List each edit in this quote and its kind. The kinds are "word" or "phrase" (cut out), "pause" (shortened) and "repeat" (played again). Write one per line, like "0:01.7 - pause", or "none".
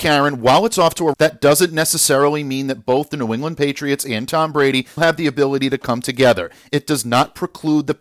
0:01.1 - phrase
0:05.0 - word

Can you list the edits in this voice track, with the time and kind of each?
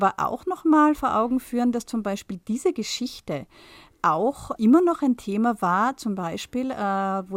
0:04.6 - word

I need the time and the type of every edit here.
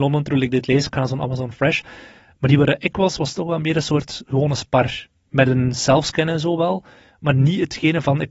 none

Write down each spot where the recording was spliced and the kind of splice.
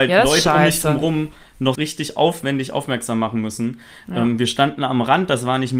0:01.7 - word

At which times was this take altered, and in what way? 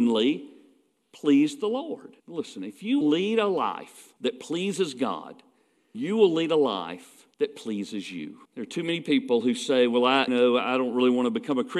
0:02.2 - pause
0:03.0 - word
0:04.2 - pause
0:05.9 - word
0:07.3 - pause
0:08.4 - pause
0:10.3 - word

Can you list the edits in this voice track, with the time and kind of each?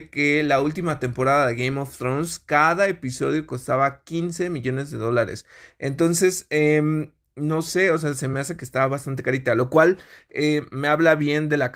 none

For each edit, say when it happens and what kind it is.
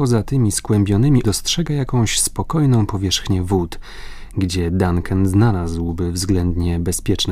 0:01.2 - word

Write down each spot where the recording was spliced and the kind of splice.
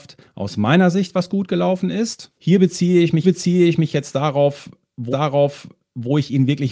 0:02.4 - pause
0:03.2 - repeat
0:05.1 - repeat

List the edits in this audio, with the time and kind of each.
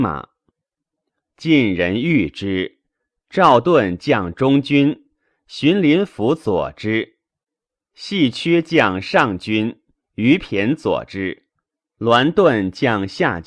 none

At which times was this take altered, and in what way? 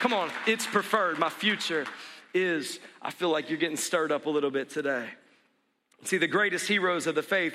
none

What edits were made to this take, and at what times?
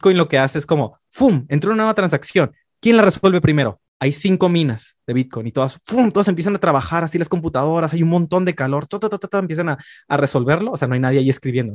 none

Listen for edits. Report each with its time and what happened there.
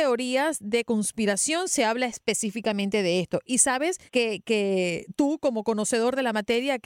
0:04.1 - pause

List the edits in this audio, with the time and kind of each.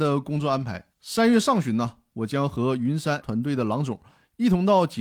0:00.9 - pause
0:03.2 - word

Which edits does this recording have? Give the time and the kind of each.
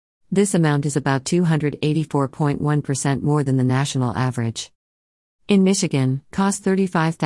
0:06.3 - word

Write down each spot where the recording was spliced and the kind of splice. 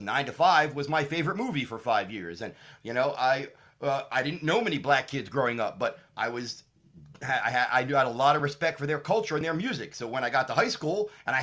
none

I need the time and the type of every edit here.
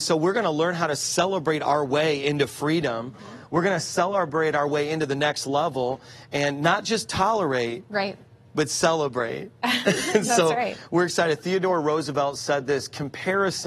none

